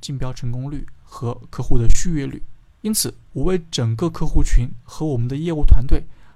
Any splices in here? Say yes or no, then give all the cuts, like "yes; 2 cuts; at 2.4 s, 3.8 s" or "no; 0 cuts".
yes; 1 cut; at 2.7 s